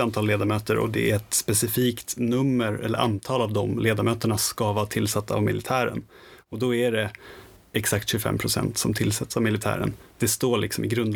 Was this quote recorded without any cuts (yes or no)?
yes